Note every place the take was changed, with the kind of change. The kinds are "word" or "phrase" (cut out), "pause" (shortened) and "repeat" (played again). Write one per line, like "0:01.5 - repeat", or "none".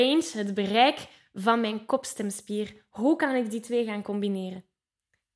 none